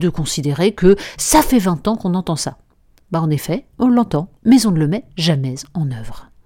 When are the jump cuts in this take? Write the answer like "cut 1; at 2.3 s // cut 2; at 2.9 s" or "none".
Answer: cut 1; at 3.7 s // cut 2; at 4.4 s